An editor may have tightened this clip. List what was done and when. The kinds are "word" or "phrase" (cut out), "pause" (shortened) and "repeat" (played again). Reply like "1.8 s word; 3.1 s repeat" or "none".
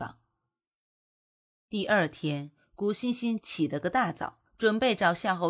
4.5 s pause